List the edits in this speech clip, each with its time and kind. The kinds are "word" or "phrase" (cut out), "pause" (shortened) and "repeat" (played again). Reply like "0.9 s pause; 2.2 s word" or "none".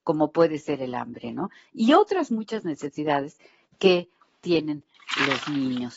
none